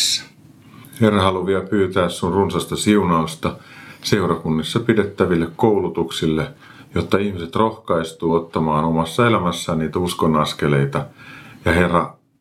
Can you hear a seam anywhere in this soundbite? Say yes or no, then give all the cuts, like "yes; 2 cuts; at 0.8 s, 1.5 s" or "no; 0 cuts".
no; 0 cuts